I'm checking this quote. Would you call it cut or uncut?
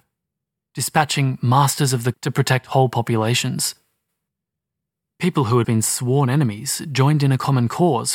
cut